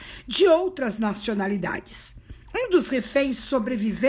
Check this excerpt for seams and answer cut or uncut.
uncut